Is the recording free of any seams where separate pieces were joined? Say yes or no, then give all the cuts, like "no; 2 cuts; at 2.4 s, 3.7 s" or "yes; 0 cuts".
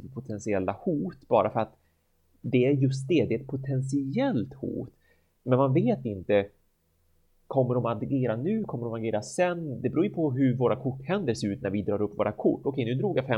yes; 0 cuts